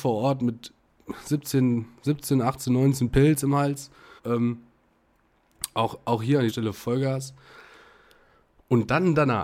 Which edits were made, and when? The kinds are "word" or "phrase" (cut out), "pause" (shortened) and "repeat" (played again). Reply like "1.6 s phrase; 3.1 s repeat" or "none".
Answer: 4.2 s pause; 6.5 s word